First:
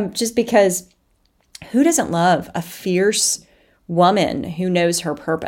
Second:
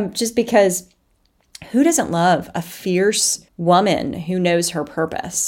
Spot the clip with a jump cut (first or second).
second